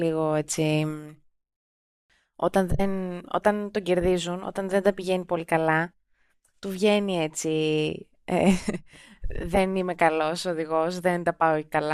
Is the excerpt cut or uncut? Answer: uncut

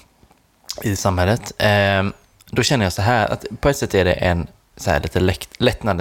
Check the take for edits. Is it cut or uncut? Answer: uncut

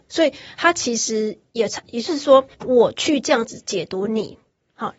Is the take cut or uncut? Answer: cut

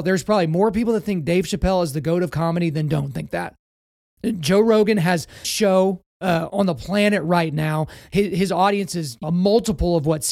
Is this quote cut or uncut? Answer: cut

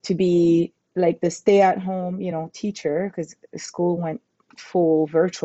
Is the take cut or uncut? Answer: uncut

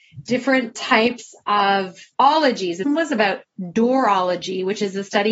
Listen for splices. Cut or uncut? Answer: cut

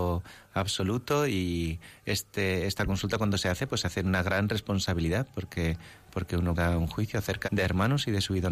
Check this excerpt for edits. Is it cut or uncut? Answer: cut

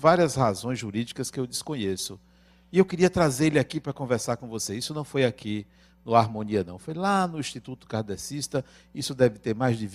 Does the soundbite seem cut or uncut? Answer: uncut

